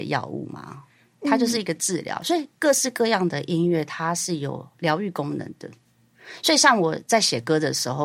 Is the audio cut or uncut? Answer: uncut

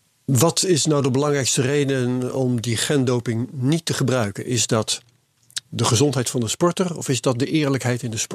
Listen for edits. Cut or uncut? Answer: cut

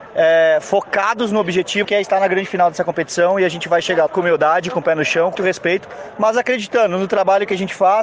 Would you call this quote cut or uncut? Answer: cut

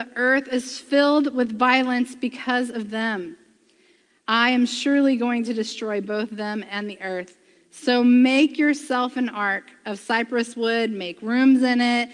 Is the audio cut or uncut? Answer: uncut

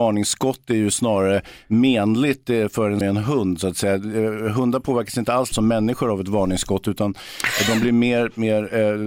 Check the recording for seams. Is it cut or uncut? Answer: cut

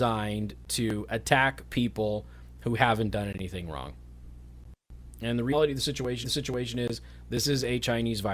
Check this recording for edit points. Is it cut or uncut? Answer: cut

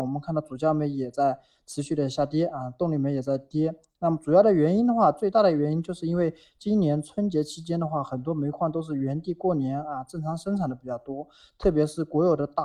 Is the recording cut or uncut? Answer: uncut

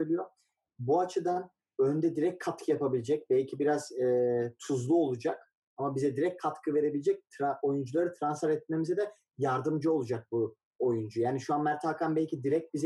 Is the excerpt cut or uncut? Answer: uncut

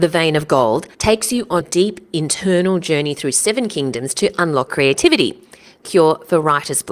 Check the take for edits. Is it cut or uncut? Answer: cut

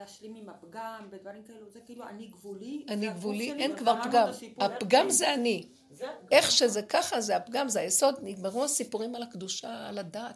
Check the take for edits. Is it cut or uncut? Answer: uncut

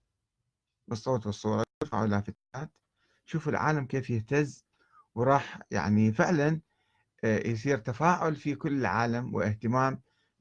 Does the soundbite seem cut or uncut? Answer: uncut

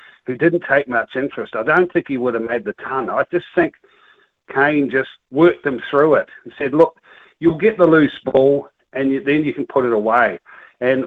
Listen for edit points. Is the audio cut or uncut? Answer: cut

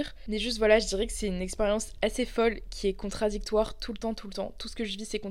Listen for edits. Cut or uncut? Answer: uncut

